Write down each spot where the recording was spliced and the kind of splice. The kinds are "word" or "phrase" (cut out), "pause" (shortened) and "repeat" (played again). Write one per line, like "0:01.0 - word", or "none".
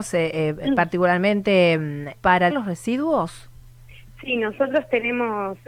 0:02.1 - word
0:02.5 - word